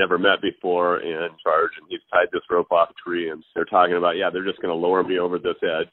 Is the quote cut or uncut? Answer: cut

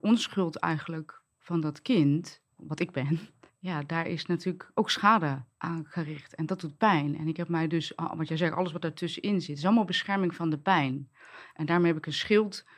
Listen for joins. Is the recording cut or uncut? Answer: cut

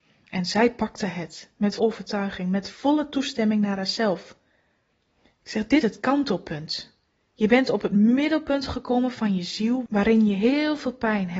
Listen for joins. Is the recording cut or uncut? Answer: cut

